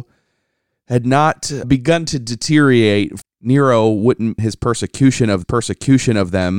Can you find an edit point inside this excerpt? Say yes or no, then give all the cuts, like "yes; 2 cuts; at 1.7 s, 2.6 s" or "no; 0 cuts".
yes; 4 cuts; at 1.6 s, 3.2 s, 4.4 s, 5.4 s